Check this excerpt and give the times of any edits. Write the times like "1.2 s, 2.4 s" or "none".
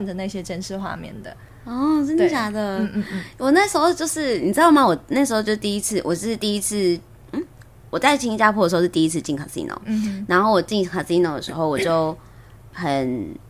none